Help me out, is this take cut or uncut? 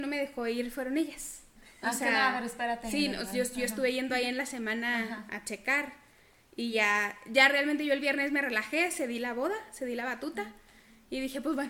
uncut